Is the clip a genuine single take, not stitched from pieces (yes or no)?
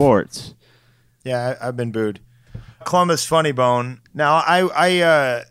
no